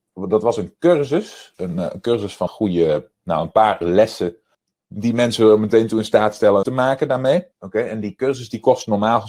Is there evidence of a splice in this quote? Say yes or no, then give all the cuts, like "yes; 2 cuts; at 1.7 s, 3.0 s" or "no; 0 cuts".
yes; 6 cuts; at 1.5 s, 2.5 s, 3.8 s, 4.5 s, 6.6 s, 7.5 s